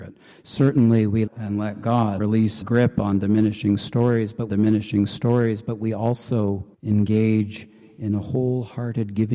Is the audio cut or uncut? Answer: cut